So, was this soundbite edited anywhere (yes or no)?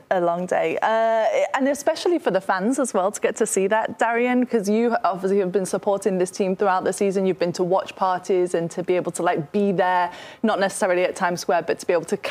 no